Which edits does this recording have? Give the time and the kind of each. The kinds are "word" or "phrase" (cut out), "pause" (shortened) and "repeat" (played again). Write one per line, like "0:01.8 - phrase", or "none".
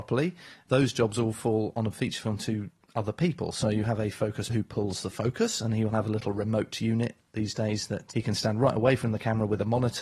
0:04.5 - word
0:08.1 - word